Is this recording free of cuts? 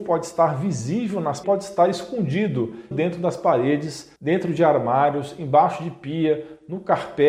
no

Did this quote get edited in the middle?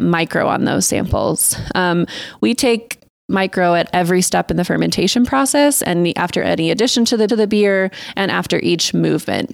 yes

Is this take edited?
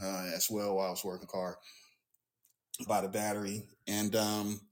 yes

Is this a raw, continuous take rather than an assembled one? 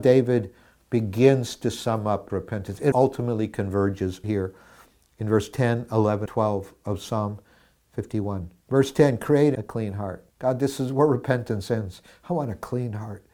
no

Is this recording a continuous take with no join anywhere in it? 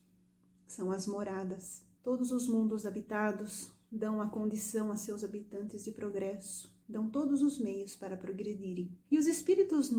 no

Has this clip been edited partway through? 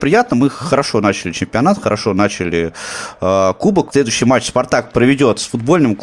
no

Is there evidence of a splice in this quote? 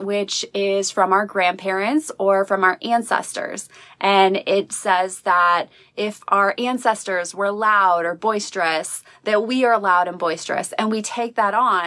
no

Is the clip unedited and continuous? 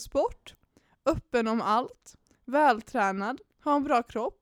yes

